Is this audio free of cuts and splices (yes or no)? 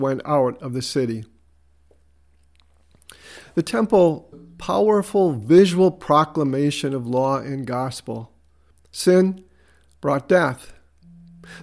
no